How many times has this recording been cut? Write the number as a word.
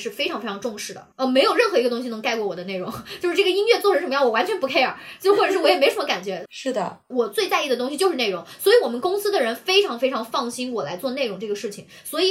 zero